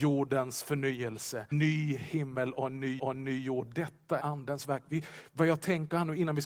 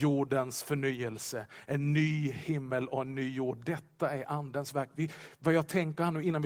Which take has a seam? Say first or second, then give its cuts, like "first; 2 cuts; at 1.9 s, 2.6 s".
first; 3 cuts; at 1.5 s, 3.0 s, 4.2 s